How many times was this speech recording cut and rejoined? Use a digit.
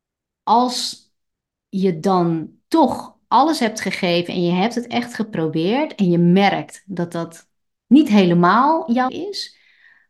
1